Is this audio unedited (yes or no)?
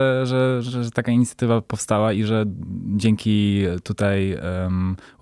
yes